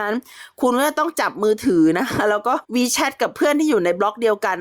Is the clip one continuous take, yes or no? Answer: no